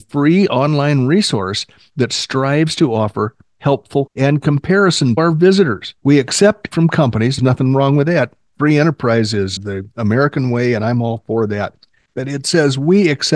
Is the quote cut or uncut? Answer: cut